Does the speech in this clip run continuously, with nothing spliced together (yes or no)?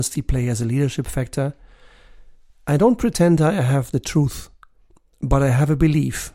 yes